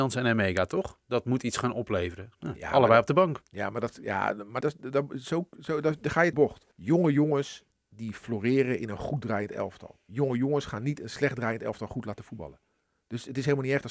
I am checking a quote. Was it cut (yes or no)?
yes